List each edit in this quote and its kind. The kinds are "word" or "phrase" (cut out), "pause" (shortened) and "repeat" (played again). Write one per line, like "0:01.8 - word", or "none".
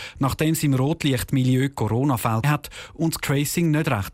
0:02.4 - word
0:03.2 - word